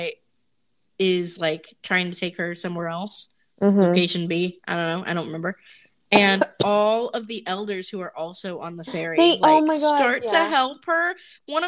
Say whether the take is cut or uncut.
uncut